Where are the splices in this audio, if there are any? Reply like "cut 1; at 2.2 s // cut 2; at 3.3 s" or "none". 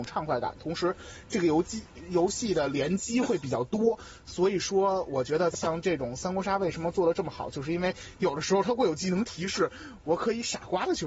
cut 1; at 5.5 s